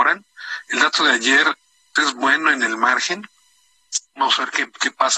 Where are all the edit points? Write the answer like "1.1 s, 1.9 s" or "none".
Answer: 2.0 s